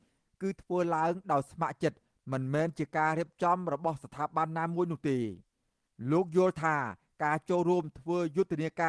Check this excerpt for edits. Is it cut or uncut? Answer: uncut